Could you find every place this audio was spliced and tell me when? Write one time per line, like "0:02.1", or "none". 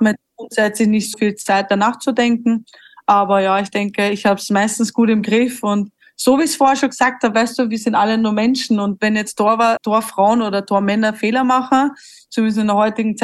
0:01.1
0:09.8